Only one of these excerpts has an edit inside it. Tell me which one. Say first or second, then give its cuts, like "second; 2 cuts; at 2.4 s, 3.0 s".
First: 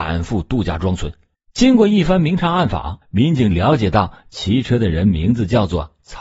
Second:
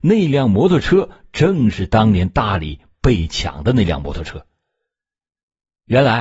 first; 2 cuts; at 1.3 s, 3.0 s